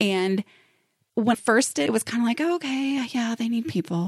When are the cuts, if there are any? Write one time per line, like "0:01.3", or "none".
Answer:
0:01.3
0:01.9